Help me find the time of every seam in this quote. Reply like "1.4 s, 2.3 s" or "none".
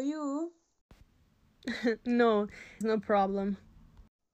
2.8 s

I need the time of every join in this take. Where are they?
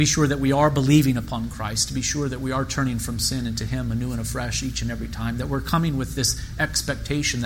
none

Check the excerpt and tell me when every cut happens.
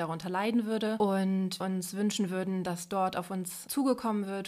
1.6 s

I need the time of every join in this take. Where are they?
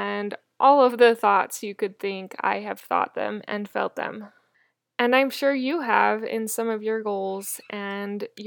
none

